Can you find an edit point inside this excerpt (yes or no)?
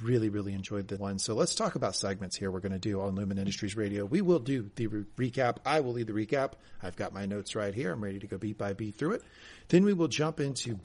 yes